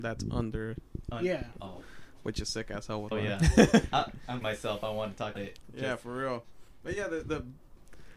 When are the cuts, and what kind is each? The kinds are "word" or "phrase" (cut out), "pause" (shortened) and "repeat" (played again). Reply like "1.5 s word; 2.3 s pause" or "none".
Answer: 3.1 s word; 4.4 s word; 5.4 s word; 7.2 s word